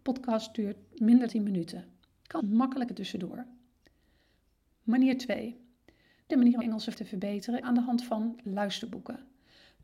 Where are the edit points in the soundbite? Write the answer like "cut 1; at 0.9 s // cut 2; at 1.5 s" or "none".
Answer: cut 1; at 1.3 s // cut 2; at 2.4 s // cut 3; at 2.9 s // cut 4; at 6.3 s // cut 5; at 6.6 s // cut 6; at 6.9 s // cut 7; at 7.6 s